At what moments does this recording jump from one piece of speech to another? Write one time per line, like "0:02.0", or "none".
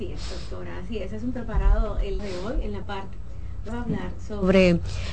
0:01.3
0:02.2
0:02.8
0:03.7